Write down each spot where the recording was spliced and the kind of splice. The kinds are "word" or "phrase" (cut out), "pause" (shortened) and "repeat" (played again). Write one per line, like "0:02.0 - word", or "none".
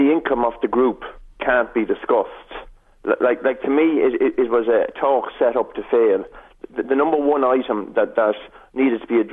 none